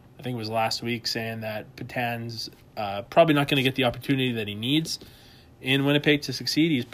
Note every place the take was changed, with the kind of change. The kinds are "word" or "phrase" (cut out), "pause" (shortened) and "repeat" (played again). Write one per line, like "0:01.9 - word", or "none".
none